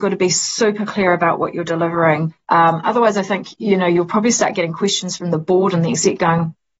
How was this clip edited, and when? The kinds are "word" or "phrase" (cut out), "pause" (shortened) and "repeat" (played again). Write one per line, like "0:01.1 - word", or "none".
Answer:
0:02.4 - pause

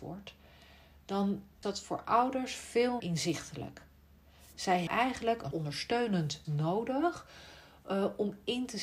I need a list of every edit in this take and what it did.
0:01.6 - word
0:03.0 - word
0:04.9 - word
0:05.5 - word
0:06.4 - phrase

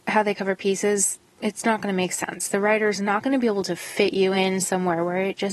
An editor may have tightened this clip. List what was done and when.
none

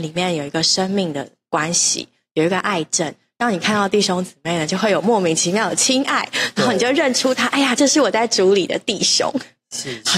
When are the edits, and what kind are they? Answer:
none

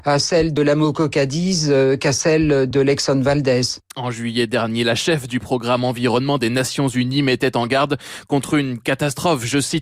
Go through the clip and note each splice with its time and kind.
0:03.9 - pause

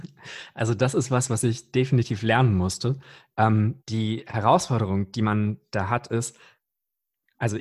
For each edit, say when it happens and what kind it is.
0:03.8 - pause

